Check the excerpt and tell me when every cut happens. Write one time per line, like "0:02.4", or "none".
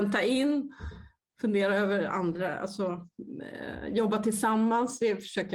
none